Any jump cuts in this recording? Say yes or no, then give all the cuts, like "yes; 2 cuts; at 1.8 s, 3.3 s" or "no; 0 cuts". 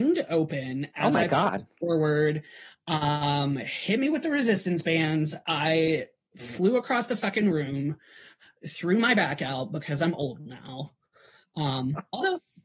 no; 0 cuts